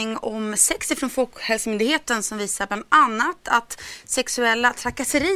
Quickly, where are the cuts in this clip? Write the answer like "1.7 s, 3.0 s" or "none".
none